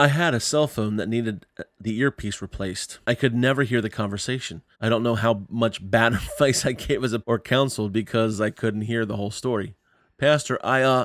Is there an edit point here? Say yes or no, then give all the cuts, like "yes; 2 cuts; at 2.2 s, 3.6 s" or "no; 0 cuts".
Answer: yes; 3 cuts; at 3.0 s, 4.7 s, 7.2 s